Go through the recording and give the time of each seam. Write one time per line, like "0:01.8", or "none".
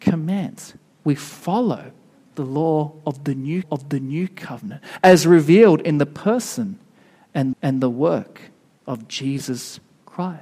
0:03.6
0:07.5